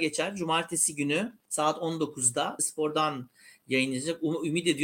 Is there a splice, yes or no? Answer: yes